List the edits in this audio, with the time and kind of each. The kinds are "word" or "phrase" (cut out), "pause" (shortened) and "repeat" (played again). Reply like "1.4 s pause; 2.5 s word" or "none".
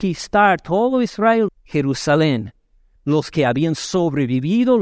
1.5 s word; 3.0 s word